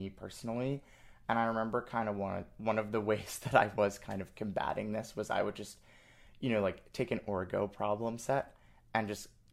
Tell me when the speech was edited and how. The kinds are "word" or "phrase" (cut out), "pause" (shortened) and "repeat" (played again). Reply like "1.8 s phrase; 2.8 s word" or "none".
none